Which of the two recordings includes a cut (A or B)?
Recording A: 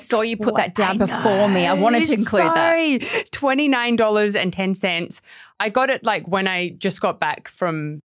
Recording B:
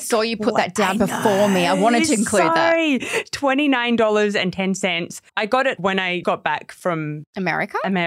B